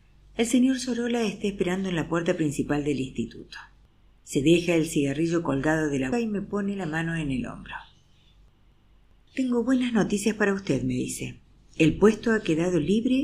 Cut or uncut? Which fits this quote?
cut